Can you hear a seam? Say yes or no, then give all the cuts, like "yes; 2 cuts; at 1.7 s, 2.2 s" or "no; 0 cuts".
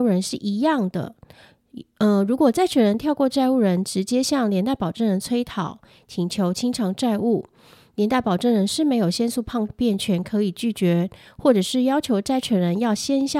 no; 0 cuts